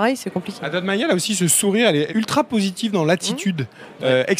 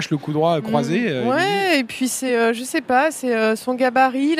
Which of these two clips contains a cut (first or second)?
first